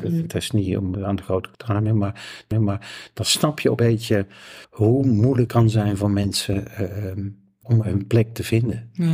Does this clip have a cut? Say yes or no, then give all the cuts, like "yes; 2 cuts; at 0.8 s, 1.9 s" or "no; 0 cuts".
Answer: yes; 7 cuts; at 0.9 s, 1.5 s, 2.5 s, 3.8 s, 4.6 s, 5.5 s, 7.6 s